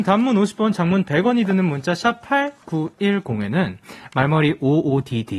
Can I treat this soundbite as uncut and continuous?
yes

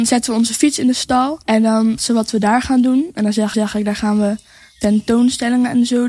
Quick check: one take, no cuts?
no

